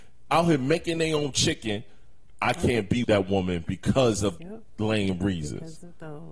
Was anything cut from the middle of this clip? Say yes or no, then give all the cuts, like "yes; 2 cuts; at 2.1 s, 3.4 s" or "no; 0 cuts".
yes; 2 cuts; at 3.0 s, 4.4 s